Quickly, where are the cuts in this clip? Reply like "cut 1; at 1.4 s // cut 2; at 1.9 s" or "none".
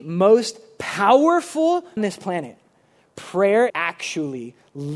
cut 1; at 2.0 s // cut 2; at 3.7 s